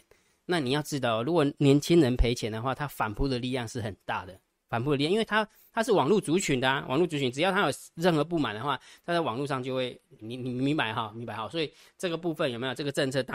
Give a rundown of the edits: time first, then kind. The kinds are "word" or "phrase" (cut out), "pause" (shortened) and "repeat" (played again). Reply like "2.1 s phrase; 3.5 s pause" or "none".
10.2 s word